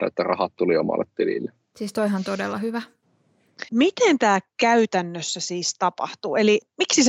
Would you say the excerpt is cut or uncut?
cut